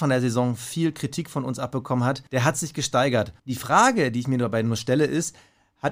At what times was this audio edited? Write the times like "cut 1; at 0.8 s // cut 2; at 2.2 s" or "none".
cut 1; at 2.3 s // cut 2; at 3.4 s